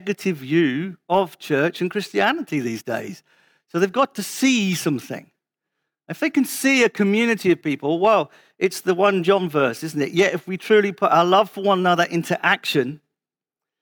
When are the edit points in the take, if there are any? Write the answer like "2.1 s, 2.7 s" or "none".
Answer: none